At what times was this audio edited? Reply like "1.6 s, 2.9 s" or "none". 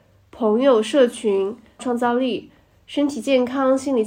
1.8 s